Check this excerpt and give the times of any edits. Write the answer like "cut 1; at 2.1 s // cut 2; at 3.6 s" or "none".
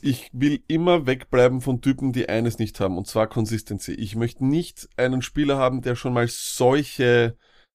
none